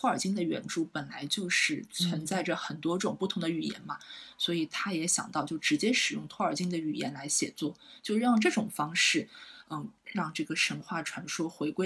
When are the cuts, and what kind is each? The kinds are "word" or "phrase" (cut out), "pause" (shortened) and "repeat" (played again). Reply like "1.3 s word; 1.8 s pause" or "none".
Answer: none